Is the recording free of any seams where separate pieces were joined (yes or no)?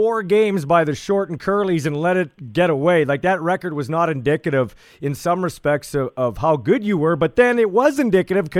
yes